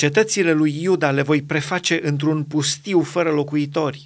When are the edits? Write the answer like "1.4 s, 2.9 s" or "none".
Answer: none